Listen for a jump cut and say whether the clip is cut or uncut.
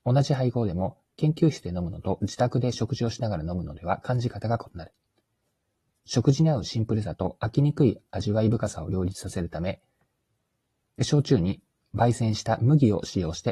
uncut